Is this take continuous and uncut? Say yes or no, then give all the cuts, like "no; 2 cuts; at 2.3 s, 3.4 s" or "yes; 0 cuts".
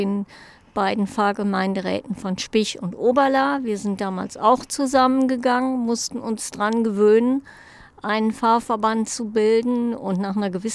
yes; 0 cuts